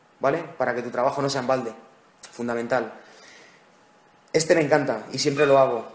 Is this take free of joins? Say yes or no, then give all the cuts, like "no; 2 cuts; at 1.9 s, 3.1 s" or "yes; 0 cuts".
yes; 0 cuts